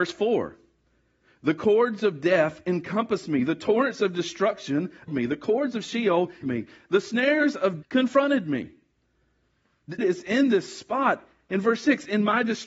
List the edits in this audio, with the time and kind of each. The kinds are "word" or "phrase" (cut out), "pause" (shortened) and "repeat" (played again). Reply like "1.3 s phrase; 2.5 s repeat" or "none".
5.1 s word; 6.4 s word; 7.8 s word; 10.0 s word